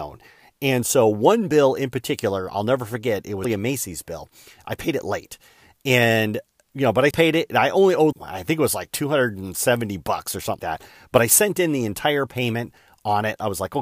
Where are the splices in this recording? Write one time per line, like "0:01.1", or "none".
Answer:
0:03.4
0:07.1
0:08.1
0:10.6